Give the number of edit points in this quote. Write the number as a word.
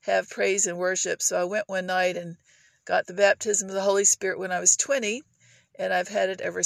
zero